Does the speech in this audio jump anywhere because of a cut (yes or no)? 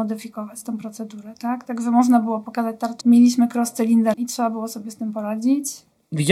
yes